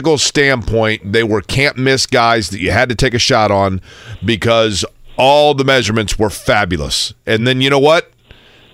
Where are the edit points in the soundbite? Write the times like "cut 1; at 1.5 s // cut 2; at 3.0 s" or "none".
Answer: none